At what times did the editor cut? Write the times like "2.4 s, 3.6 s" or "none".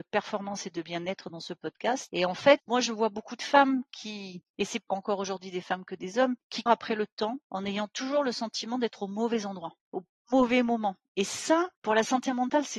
4.5 s, 4.9 s, 6.7 s, 7.4 s, 9.8 s, 11.8 s

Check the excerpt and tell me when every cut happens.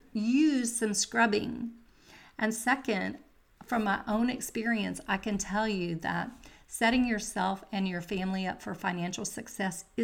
none

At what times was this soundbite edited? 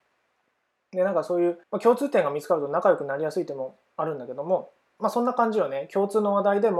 1.6 s

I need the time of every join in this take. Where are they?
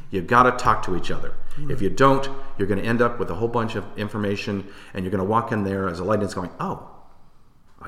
none

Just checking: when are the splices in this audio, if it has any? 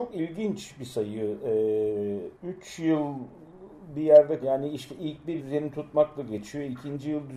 2.3 s, 4.4 s, 5.4 s

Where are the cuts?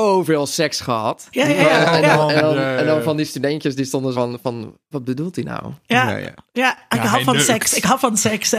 4.1 s, 4.9 s

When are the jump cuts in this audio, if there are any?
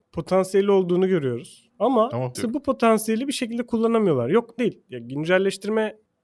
2.3 s, 4.6 s

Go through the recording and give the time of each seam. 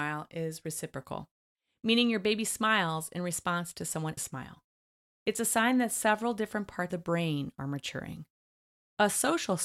4.2 s, 6.9 s

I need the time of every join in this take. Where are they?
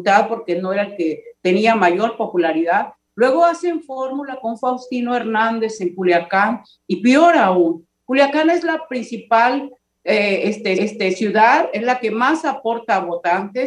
10.8 s

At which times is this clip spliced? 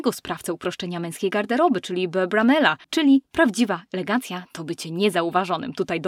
2.8 s

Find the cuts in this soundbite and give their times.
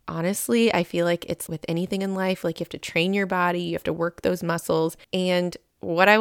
1.5 s, 5.0 s

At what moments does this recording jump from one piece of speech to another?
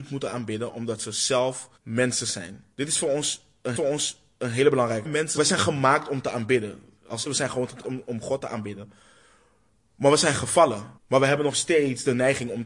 1.8 s, 2.7 s, 3.8 s, 5.0 s, 5.4 s, 7.3 s, 7.8 s, 11.0 s

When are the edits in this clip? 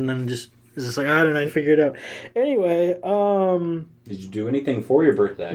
1.5 s

